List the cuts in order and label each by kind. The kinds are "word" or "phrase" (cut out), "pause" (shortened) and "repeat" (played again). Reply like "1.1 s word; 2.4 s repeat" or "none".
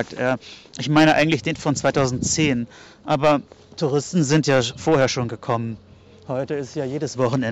none